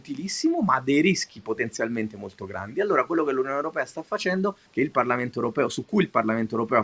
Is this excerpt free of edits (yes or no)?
no